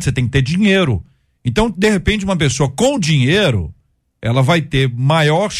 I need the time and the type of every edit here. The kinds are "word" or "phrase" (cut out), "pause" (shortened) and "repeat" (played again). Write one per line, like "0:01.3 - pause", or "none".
none